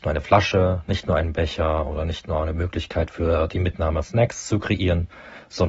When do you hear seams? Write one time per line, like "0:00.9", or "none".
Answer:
0:04.0